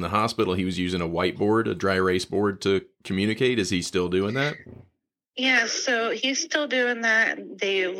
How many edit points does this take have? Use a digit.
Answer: 0